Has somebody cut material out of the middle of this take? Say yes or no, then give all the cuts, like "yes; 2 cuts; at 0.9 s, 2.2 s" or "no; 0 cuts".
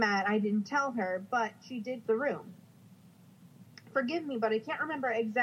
yes; 1 cut; at 2.0 s